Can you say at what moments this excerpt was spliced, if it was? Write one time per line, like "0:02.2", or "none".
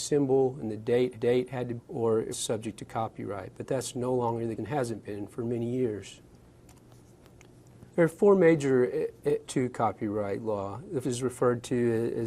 0:01.1
0:01.8
0:02.3
0:04.6
0:07.9
0:09.4
0:11.0